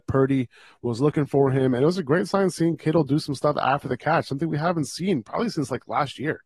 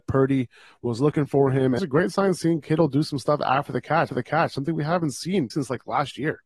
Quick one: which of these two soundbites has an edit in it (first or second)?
second